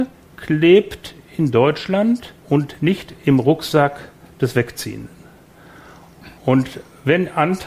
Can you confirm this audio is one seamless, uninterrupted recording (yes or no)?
no